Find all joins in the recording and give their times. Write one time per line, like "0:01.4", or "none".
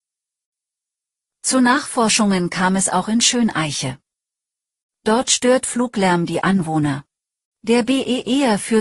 0:07.2